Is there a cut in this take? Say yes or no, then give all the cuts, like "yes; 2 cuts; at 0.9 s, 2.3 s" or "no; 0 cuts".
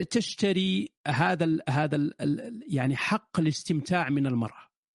yes; 1 cut; at 1.0 s